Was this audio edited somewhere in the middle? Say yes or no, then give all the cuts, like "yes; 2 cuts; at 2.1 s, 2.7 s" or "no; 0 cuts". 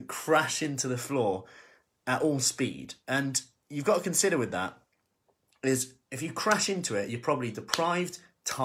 no; 0 cuts